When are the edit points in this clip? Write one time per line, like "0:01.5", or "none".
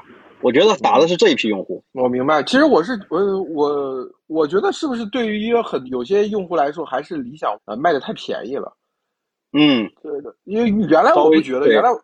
0:01.9
0:07.5
0:09.9
0:10.4